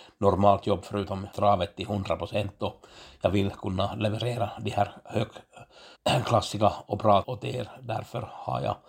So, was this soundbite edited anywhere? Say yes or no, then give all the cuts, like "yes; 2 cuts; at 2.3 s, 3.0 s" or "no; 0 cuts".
yes; 3 cuts; at 1.3 s, 5.9 s, 7.2 s